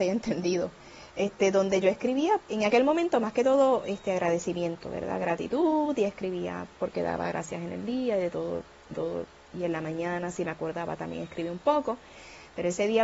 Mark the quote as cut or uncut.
cut